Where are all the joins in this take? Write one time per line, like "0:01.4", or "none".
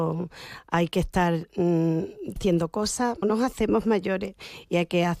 0:02.4
0:03.2